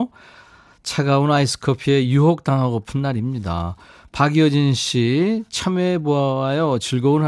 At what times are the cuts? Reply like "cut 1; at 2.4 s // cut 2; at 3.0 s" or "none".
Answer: none